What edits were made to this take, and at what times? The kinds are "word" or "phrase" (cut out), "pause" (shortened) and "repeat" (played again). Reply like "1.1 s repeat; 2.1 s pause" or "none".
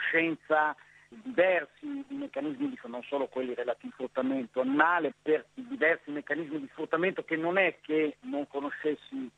2.8 s word; 3.9 s word; 5.1 s word; 5.4 s word